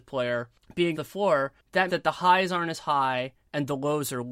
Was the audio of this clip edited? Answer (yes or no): yes